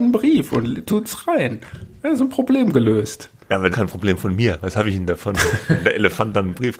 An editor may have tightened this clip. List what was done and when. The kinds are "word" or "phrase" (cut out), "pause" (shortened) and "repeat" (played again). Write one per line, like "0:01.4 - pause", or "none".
0:03.7 - phrase